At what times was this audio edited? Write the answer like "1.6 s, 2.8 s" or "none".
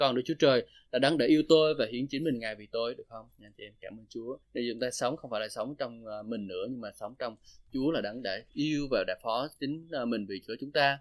3.3 s, 4.4 s